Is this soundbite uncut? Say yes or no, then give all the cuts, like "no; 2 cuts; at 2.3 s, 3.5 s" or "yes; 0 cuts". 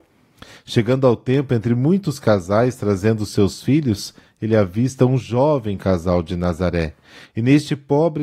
yes; 0 cuts